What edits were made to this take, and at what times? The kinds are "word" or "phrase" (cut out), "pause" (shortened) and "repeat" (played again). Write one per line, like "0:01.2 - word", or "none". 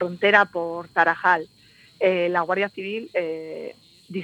none